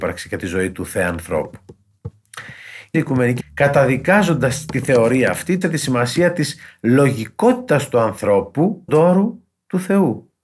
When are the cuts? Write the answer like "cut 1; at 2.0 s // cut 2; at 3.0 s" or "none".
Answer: cut 1; at 2.9 s // cut 2; at 3.4 s // cut 3; at 5.6 s // cut 4; at 8.9 s

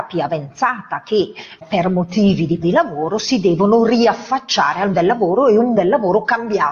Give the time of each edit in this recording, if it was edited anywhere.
cut 1; at 1.6 s // cut 2; at 2.6 s // cut 3; at 4.9 s // cut 4; at 5.8 s

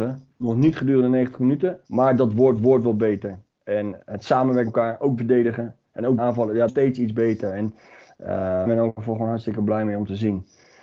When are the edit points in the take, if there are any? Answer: cut 1; at 1.8 s // cut 2; at 2.6 s // cut 3; at 4.0 s // cut 4; at 4.7 s // cut 5; at 5.2 s // cut 6; at 6.2 s // cut 7; at 6.7 s // cut 8; at 8.7 s

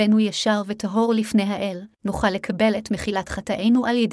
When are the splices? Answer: cut 1; at 1.9 s

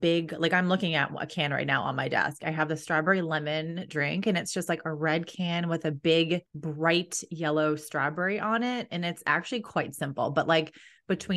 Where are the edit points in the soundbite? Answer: cut 1; at 6.5 s

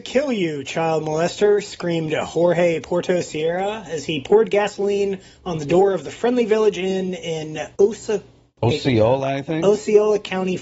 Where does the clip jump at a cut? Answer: cut 1; at 7.7 s

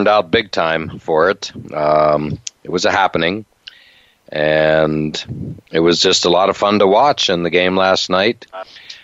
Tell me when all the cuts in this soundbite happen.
none

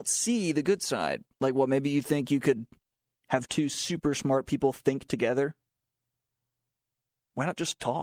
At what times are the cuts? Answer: cut 1; at 1.3 s

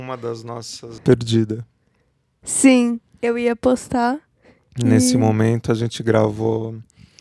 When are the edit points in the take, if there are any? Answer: cut 1; at 1.0 s

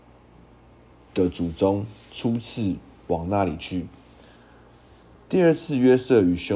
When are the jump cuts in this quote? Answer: none

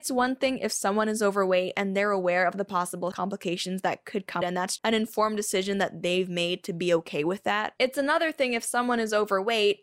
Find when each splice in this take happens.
cut 1; at 3.1 s // cut 2; at 4.4 s // cut 3; at 4.8 s

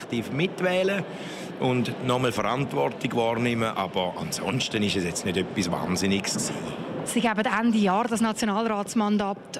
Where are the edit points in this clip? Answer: none

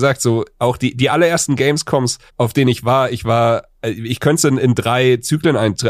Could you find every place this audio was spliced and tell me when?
cut 1; at 2.3 s

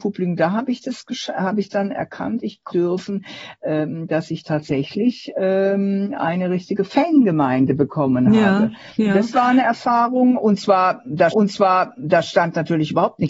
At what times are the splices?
cut 1; at 2.7 s // cut 2; at 11.3 s

